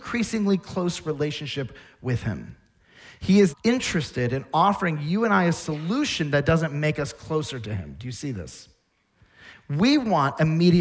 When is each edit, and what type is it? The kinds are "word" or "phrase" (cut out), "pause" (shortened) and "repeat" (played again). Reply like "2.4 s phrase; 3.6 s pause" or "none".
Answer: 3.5 s word